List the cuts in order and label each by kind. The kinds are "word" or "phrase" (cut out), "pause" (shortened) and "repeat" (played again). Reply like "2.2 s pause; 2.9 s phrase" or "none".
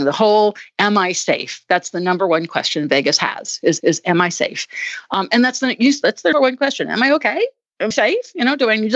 3.8 s repeat; 6.0 s phrase; 6.3 s word; 7.9 s word